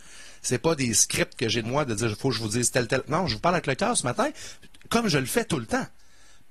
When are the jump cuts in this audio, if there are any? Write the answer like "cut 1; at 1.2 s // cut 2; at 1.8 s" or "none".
cut 1; at 1.6 s